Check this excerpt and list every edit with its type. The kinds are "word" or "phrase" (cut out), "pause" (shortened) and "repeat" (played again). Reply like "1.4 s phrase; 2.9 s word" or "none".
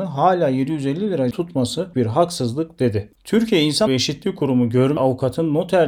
1.3 s word; 1.9 s word; 3.9 s word; 5.0 s word